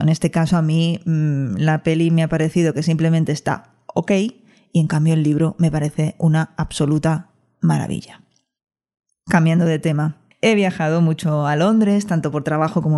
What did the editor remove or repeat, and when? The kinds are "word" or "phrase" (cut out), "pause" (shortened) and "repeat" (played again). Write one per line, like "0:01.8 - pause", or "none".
none